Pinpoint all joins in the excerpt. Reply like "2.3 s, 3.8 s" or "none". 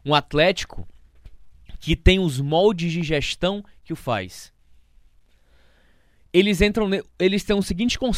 4.0 s